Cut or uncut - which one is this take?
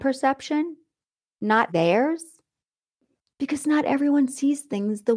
cut